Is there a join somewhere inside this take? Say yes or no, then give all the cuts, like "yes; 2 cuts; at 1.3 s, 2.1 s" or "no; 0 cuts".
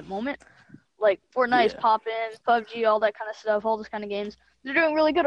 yes; 1 cut; at 2.4 s